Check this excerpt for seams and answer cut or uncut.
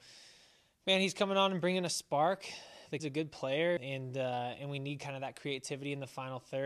cut